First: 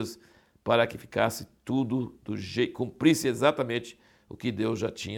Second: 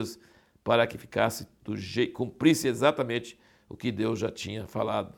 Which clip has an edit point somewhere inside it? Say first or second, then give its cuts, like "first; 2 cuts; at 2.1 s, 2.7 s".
second; 1 cut; at 1.6 s